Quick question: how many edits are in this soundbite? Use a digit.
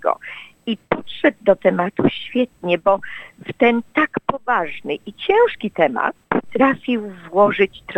0